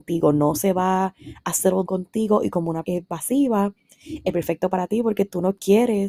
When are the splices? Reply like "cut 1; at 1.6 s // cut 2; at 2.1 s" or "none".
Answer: cut 1; at 1.8 s // cut 2; at 2.8 s